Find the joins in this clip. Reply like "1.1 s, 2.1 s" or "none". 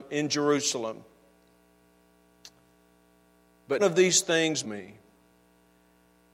3.8 s, 4.6 s